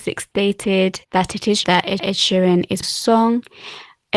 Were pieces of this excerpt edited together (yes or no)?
yes